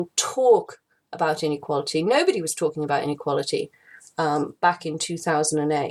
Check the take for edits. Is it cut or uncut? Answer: uncut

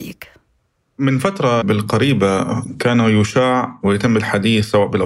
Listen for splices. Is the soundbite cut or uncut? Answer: cut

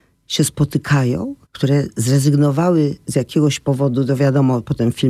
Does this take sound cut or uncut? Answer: cut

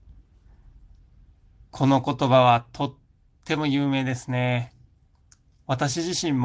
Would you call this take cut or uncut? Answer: uncut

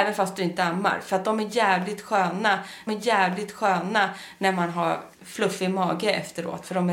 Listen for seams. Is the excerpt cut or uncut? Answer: cut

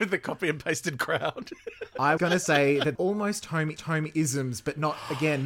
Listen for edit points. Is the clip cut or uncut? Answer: cut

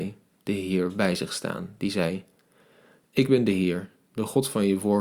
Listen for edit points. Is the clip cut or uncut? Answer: uncut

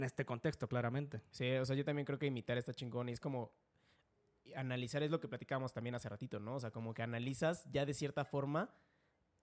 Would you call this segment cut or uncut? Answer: uncut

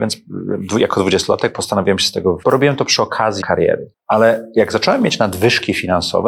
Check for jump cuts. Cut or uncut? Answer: cut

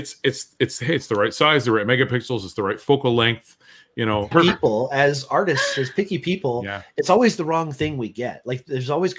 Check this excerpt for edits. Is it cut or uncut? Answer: cut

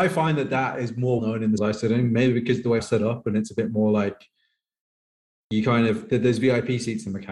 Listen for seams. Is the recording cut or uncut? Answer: cut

